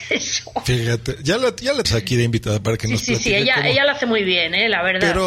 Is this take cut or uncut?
cut